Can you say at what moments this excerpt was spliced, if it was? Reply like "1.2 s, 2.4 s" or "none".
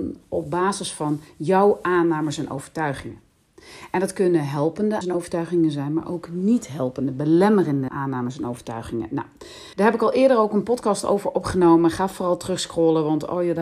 5.0 s, 7.9 s, 9.7 s